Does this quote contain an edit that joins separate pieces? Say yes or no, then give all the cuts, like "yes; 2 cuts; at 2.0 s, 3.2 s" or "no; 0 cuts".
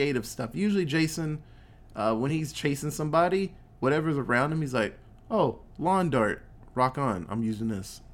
no; 0 cuts